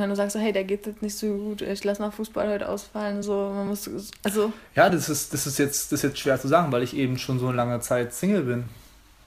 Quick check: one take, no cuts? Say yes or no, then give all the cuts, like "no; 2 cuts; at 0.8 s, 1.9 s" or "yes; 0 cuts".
yes; 0 cuts